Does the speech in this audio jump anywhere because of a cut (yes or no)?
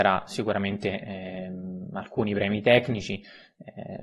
no